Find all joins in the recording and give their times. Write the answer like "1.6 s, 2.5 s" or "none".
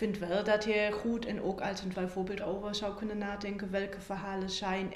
1.9 s, 2.4 s